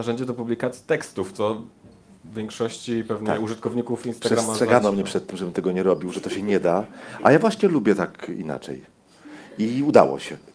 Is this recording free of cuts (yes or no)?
yes